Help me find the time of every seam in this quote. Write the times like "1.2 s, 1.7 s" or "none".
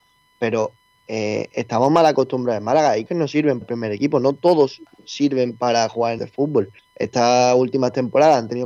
3.1 s, 3.6 s, 6.2 s, 6.8 s